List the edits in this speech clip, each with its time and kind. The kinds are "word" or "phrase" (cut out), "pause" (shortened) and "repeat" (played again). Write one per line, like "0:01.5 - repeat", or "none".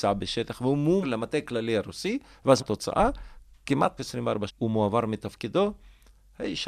0:01.0 - word
0:02.6 - word
0:04.0 - word
0:04.5 - word